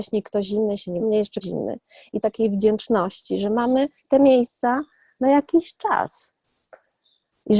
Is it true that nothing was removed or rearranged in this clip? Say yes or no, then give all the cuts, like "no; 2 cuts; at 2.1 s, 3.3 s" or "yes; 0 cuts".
no; 4 cuts; at 1.0 s, 1.4 s, 2.2 s, 4.0 s